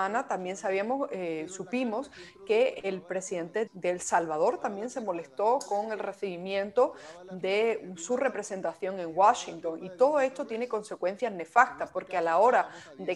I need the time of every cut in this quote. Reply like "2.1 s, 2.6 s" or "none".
3.7 s

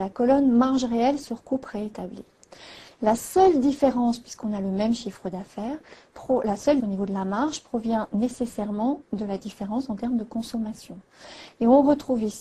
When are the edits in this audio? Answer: 6.8 s

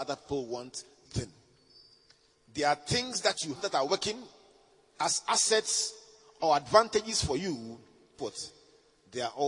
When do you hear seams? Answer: 1.1 s, 3.6 s, 8.2 s

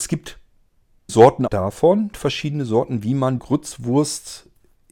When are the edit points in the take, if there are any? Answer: 1.1 s, 1.5 s, 2.1 s, 3.4 s

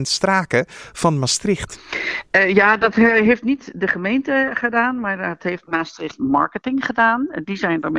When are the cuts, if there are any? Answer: none

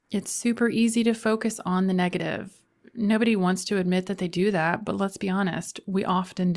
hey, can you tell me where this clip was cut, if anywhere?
none

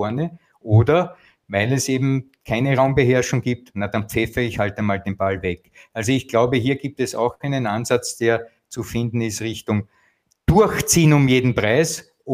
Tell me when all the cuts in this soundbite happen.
none

